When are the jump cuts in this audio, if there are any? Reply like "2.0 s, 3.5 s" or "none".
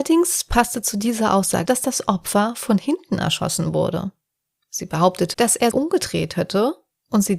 1.7 s, 5.3 s, 5.7 s